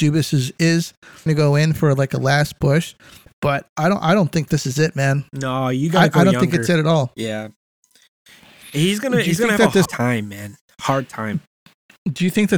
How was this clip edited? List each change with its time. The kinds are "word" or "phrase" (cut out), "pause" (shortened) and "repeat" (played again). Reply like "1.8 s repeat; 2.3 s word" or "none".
1.3 s word; 9.9 s word